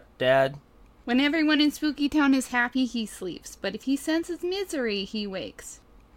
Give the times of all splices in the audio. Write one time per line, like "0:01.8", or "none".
none